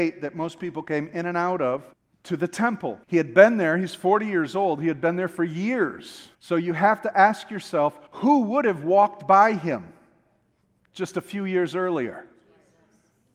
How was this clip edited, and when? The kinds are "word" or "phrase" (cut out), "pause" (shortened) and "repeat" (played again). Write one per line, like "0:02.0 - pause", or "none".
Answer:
0:01.9 - pause
0:03.0 - pause
0:06.3 - pause
0:08.1 - pause